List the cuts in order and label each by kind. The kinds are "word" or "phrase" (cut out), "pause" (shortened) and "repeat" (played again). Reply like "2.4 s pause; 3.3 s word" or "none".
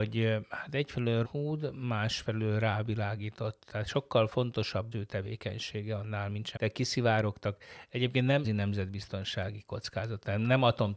1.2 s word; 4.9 s word; 6.6 s word; 8.4 s word